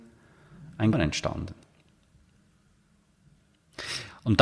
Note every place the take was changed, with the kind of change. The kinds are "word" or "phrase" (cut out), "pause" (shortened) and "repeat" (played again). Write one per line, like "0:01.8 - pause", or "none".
0:00.9 - word